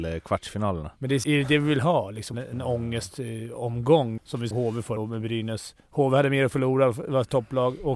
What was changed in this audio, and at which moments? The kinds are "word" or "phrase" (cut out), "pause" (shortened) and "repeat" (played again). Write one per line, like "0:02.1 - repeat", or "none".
0:01.2 - word
0:02.3 - word
0:04.2 - word
0:04.5 - word
0:05.0 - word